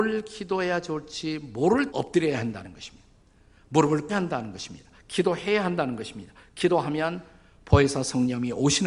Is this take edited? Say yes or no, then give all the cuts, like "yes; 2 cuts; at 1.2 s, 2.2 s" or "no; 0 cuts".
yes; 2 cuts; at 1.9 s, 4.1 s